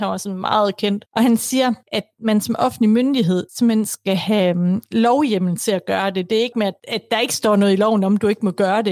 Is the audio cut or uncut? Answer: cut